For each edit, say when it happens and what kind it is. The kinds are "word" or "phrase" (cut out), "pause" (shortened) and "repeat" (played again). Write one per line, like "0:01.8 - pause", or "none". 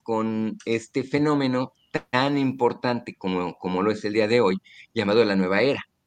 none

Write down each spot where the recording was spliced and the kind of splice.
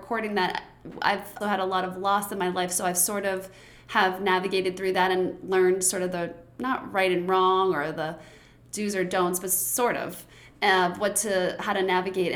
0:01.4 - word

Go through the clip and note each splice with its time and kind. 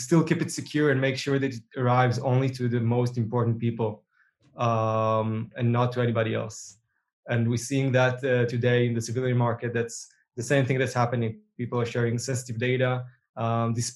none

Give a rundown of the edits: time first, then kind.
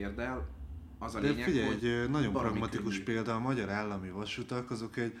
0:01.8 - word

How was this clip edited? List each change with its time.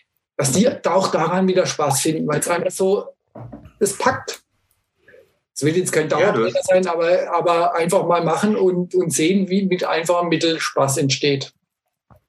none

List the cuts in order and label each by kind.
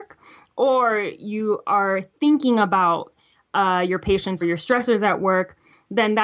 0:04.4 - word

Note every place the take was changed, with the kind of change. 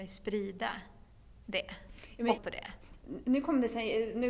0:02.4 - word

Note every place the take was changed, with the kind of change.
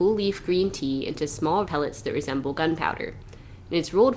0:01.7 - word

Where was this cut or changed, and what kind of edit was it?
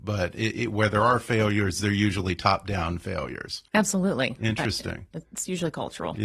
0:03.7 - pause

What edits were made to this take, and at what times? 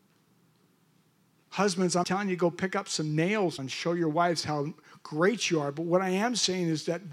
0:02.0 - word
0:03.6 - word

